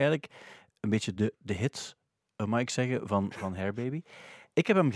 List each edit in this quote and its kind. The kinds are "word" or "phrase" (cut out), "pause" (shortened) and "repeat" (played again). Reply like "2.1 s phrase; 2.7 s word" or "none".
none